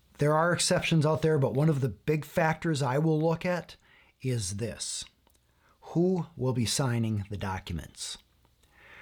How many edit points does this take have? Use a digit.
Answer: 0